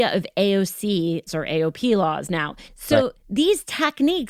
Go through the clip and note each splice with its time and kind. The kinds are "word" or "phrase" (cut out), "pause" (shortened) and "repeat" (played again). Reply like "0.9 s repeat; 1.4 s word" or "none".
1.3 s word; 2.7 s pause; 3.2 s pause